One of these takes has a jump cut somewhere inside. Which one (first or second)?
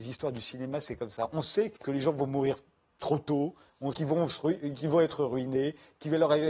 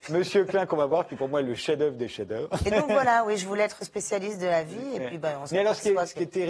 first